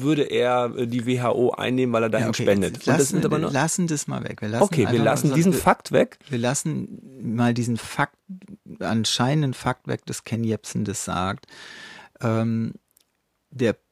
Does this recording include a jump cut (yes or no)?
no